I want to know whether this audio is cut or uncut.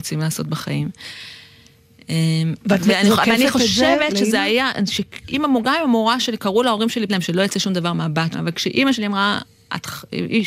cut